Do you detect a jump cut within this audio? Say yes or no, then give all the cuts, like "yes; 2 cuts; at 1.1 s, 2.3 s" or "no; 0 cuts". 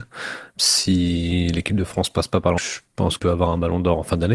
yes; 2 cuts; at 2.6 s, 3.2 s